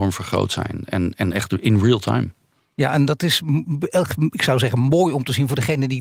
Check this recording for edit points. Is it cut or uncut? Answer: uncut